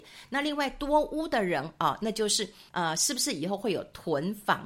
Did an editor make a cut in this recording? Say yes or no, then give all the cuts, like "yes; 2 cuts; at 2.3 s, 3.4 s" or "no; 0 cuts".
yes; 1 cut; at 2.7 s